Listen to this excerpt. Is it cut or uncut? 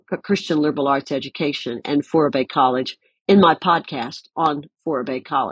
uncut